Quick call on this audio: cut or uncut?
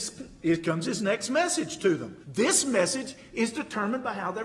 cut